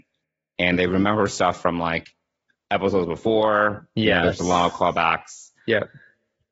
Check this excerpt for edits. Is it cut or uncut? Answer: uncut